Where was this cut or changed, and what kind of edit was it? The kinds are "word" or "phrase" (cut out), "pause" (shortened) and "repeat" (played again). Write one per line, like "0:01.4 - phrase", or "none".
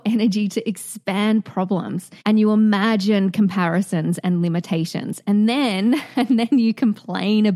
0:02.2 - pause